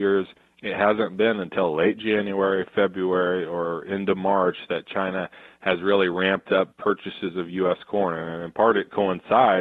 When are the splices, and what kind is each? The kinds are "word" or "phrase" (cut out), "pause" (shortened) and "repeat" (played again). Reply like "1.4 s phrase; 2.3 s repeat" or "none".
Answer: none